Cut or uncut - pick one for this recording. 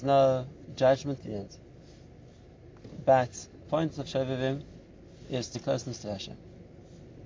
cut